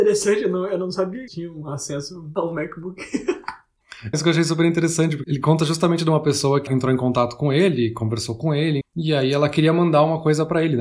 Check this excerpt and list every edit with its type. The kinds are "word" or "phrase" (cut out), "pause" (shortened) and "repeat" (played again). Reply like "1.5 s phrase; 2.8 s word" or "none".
1.3 s phrase; 4.1 s phrase; 5.2 s word; 8.8 s word